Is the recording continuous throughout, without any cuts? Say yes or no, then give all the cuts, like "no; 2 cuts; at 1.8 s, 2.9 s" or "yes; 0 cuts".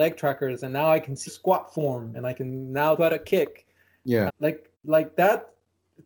no; 5 cuts; at 1.3 s, 2.1 s, 3.0 s, 4.3 s, 4.7 s